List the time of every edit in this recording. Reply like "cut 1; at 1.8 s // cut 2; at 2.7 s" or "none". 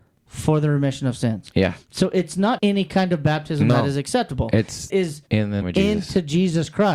cut 1; at 2.6 s // cut 2; at 4.9 s // cut 3; at 5.3 s // cut 4; at 5.6 s